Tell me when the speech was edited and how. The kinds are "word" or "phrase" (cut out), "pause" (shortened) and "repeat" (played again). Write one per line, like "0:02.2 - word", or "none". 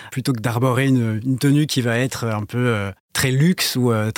none

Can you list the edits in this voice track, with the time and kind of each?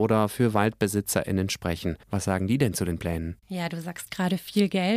0:02.0 - pause

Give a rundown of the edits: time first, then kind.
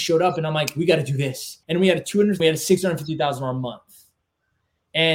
0:01.6 - pause
0:02.4 - phrase

